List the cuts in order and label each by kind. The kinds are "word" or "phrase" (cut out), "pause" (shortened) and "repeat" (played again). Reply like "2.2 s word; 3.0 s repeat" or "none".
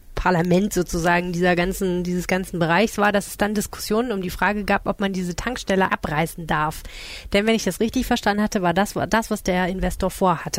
5.9 s word

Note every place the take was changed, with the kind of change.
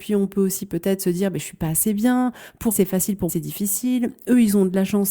2.7 s word; 3.3 s word

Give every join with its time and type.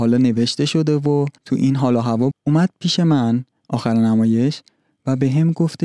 1.4 s pause; 2.3 s word

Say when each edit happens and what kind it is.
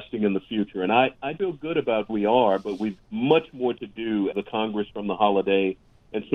1.4 s word; 2.1 s word; 3.0 s word; 4.3 s word; 4.9 s word

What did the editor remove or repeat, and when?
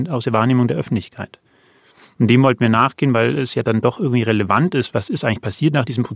none

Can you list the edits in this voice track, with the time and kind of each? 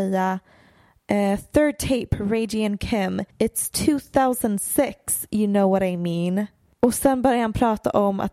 3.3 s pause

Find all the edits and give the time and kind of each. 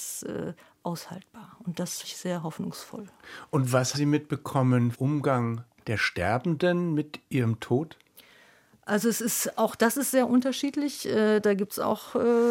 2.0 s word; 3.9 s word; 4.9 s phrase; 8.1 s pause

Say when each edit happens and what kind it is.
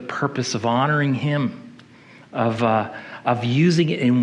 none

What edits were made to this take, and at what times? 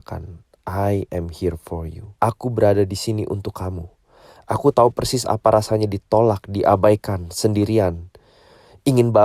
2.2 s pause

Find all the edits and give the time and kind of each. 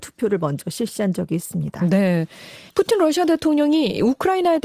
2.7 s pause

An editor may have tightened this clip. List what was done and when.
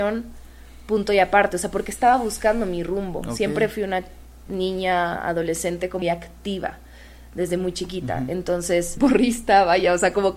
6.0 s word; 9.0 s word

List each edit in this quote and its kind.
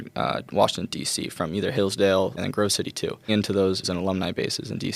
2.4 s word; 3.3 s phrase; 3.8 s word

